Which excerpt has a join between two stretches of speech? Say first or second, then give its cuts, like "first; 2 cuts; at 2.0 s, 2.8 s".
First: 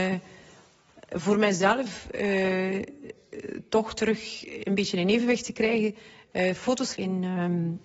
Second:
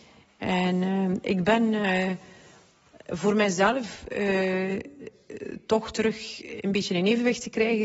first; 1 cut; at 7.0 s